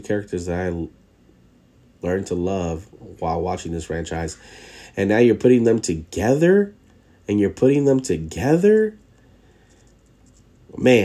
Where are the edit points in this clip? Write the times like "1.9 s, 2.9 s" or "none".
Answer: none

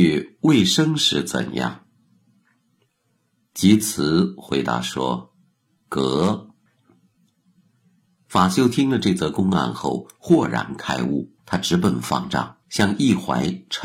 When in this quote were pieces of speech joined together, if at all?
6.7 s, 11.4 s, 12.6 s

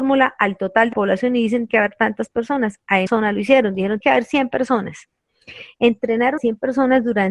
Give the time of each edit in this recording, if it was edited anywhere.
0.9 s, 1.7 s, 3.1 s, 4.0 s, 6.4 s

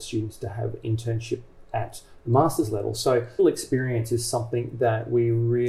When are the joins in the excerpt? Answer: 3.4 s

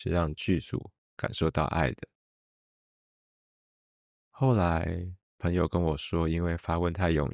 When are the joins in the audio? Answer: 5.2 s

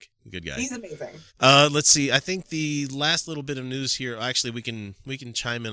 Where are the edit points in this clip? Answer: 1.3 s

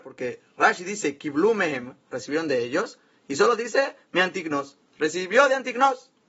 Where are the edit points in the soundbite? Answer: none

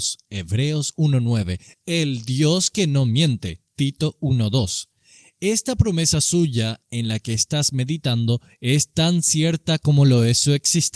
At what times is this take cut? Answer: none

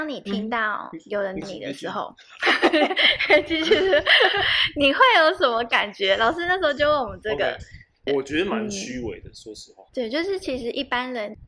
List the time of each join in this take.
1.4 s, 9.9 s

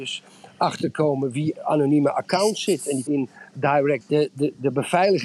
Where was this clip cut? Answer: 1.6 s, 3.1 s, 4.0 s

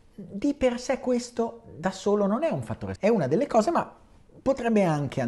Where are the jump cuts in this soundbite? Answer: 3.0 s

